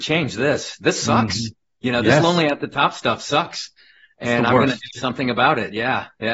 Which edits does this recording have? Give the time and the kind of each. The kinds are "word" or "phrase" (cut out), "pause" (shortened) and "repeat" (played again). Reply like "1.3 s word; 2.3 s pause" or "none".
none